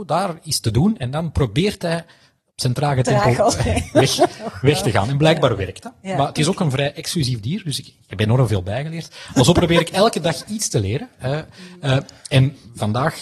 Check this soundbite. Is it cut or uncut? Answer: uncut